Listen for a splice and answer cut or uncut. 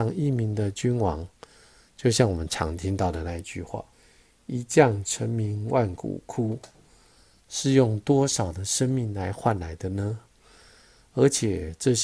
cut